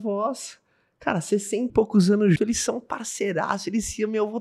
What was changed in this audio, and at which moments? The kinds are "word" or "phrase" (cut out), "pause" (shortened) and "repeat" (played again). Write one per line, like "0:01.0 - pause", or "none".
0:01.7 - word
0:02.4 - word